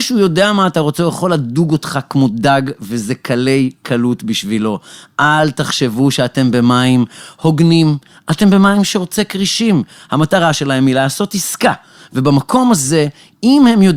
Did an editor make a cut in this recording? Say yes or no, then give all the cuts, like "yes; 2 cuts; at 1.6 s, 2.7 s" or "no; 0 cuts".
no; 0 cuts